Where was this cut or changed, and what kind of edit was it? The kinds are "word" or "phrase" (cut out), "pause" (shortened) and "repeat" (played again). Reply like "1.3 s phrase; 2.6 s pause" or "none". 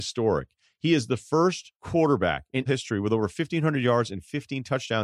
1.8 s pause; 2.7 s word